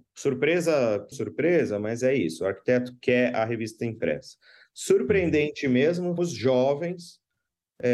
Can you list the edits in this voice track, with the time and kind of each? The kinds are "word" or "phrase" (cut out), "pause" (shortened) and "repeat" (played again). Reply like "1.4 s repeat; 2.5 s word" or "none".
1.1 s phrase; 6.2 s word